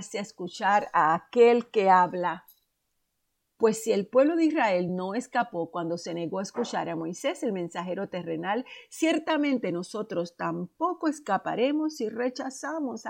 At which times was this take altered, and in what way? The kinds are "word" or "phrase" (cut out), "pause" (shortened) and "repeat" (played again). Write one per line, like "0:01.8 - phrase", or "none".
none